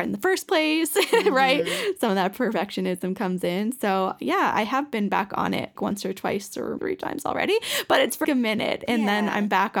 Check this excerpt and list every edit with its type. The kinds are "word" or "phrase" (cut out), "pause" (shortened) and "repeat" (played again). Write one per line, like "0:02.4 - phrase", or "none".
0:05.8 - word
0:06.8 - word
0:08.2 - word